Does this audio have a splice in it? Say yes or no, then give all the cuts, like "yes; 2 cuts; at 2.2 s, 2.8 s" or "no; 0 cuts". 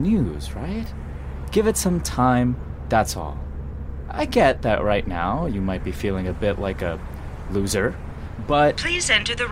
no; 0 cuts